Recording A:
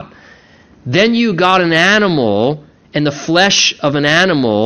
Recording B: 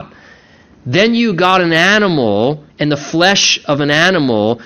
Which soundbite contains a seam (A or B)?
B